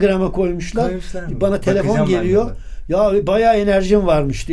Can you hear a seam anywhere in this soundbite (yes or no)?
no